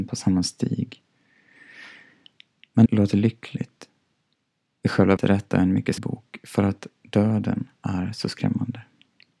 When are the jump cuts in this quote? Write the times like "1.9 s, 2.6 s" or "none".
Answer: 2.8 s, 5.2 s, 6.0 s